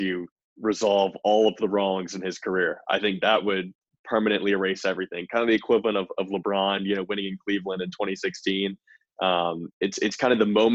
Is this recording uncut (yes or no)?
yes